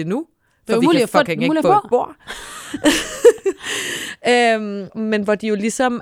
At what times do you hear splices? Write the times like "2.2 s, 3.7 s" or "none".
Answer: 1.6 s, 4.9 s